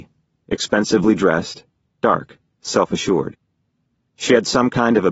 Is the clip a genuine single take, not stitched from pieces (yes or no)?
no